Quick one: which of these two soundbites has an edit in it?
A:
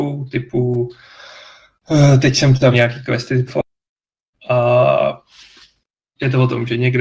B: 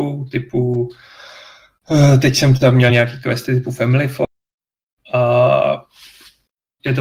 A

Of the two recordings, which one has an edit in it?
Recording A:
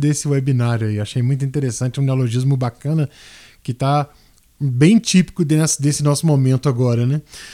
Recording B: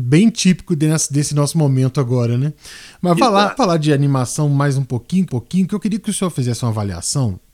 B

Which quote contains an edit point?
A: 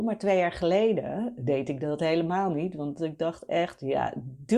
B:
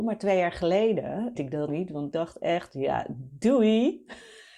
B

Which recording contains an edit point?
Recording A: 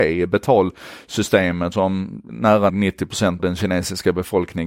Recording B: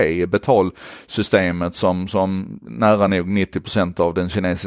A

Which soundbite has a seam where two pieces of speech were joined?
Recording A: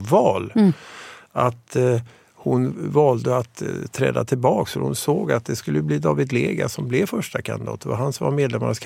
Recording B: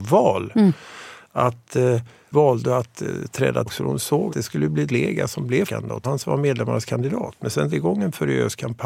B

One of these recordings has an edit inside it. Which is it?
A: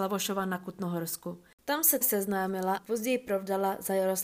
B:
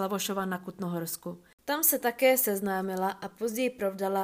A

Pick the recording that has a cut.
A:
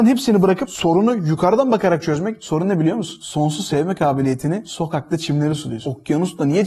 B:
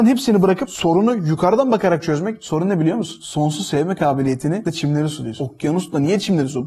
B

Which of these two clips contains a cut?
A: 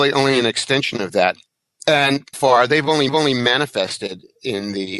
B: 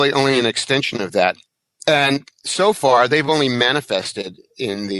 A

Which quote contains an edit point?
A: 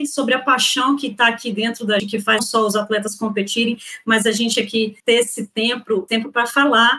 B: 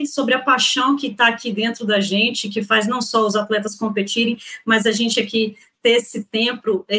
A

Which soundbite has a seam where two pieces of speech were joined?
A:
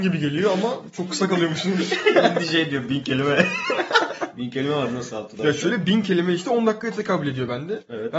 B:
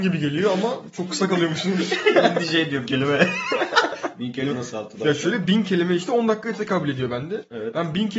B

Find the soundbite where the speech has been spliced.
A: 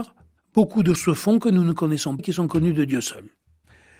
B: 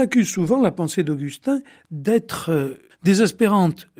A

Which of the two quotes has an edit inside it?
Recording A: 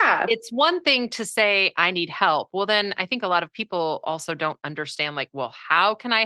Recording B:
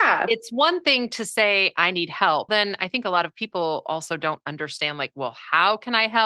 B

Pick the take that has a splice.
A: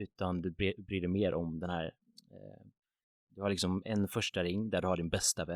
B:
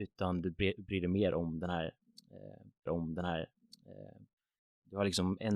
B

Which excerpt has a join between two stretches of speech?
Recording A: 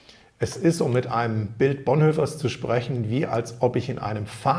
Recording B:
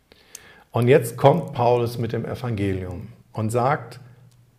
B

